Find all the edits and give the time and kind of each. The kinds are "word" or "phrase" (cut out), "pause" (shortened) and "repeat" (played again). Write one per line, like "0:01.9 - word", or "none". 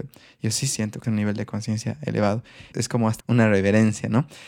0:01.0 - word
0:02.7 - word
0:03.2 - word